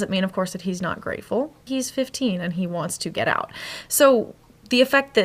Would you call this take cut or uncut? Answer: cut